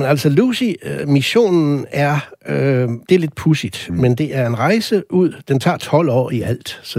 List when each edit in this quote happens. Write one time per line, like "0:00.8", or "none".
0:03.0